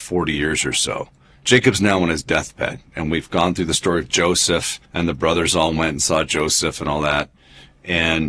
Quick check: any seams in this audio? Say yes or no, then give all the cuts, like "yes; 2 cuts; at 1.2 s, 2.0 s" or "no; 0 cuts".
yes; 2 cuts; at 1.3 s, 4.8 s